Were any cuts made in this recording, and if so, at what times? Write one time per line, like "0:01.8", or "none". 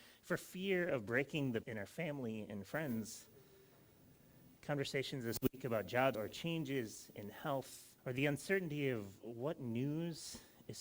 0:01.6
0:06.1
0:08.0